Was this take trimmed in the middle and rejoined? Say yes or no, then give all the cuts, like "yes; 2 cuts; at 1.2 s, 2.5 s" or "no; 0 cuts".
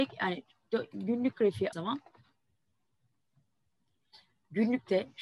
yes; 1 cut; at 1.7 s